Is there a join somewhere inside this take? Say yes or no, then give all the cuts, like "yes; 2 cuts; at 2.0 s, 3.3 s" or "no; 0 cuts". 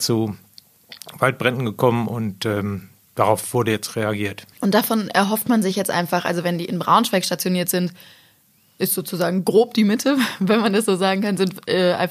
yes; 1 cut; at 4.5 s